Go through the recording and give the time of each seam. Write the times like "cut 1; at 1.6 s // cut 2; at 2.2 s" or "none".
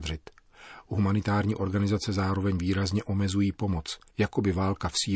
none